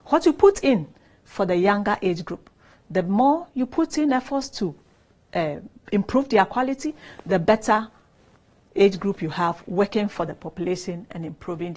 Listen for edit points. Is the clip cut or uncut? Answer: uncut